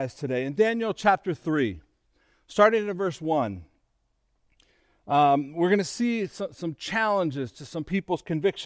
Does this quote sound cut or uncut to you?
uncut